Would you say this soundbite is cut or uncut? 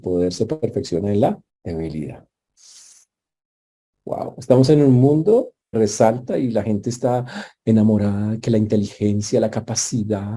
cut